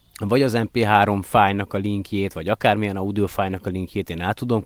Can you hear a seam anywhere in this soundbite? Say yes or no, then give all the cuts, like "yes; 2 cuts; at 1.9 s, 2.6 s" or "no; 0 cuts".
no; 0 cuts